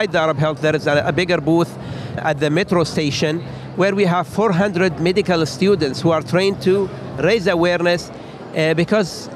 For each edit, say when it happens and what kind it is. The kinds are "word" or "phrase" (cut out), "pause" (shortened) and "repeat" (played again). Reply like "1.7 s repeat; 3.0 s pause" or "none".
2.2 s word